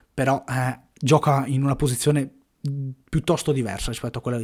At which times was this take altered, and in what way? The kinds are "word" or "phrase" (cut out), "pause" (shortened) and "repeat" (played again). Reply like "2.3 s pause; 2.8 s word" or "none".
none